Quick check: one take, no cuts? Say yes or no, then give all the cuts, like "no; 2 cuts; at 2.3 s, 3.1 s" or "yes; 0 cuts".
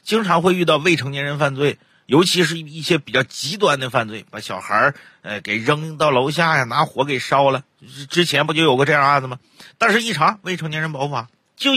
yes; 0 cuts